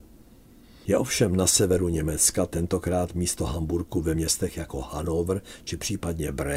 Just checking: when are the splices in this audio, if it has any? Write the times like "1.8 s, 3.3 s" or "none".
none